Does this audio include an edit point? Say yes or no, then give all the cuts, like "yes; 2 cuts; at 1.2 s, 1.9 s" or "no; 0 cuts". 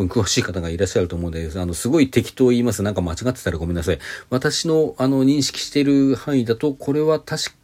no; 0 cuts